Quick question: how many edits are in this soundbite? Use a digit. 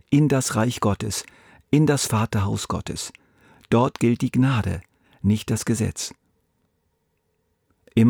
0